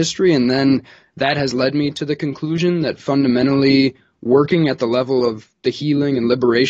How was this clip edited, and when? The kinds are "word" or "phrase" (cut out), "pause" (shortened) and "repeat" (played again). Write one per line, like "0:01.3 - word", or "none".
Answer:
none